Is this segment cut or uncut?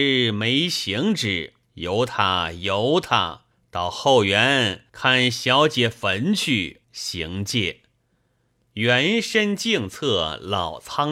cut